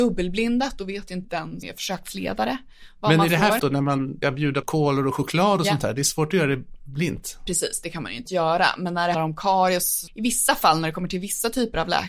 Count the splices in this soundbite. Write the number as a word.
eight